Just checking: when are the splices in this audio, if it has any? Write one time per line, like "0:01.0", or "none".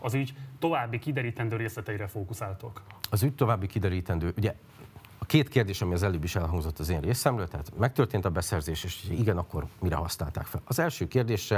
none